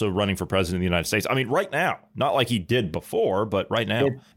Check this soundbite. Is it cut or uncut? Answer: uncut